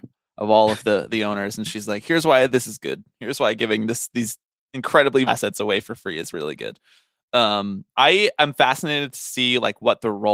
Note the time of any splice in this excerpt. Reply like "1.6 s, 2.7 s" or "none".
5.3 s, 7.9 s